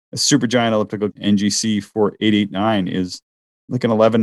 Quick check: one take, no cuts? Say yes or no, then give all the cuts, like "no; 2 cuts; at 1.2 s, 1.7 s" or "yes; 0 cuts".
no; 1 cut; at 1.1 s